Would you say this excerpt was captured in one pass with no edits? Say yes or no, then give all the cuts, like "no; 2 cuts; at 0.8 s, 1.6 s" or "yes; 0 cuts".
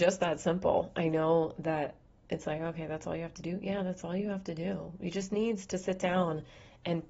yes; 0 cuts